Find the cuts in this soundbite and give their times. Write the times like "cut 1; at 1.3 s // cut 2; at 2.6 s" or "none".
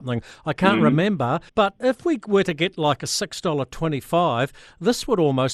cut 1; at 1.5 s